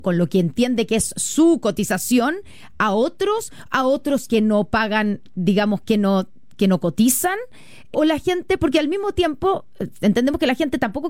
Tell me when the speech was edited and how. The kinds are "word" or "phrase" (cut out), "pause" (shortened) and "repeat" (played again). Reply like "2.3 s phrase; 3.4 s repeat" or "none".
7.9 s word